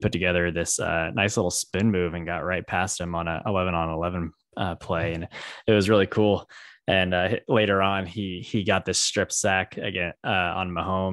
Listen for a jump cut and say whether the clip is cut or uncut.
uncut